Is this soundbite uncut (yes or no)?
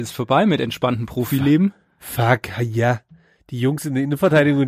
yes